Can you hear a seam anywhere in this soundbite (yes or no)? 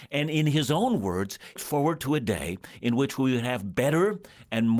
yes